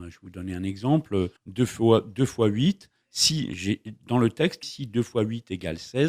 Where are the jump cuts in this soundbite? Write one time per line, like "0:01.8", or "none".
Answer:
0:01.4
0:04.6